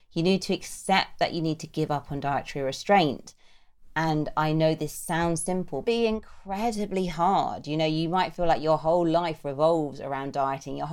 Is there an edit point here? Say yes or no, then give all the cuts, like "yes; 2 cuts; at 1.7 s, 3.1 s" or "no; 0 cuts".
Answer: yes; 1 cut; at 5.8 s